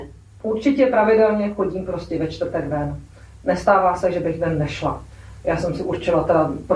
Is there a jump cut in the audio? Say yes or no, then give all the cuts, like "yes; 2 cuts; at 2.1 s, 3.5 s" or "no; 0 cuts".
no; 0 cuts